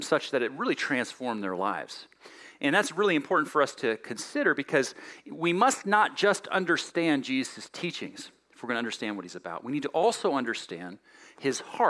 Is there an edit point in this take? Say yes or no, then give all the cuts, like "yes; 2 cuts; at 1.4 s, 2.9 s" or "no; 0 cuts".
no; 0 cuts